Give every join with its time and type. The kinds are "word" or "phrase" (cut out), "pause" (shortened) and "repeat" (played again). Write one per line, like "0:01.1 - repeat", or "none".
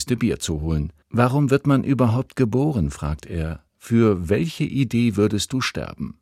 0:01.0 - pause
0:03.7 - pause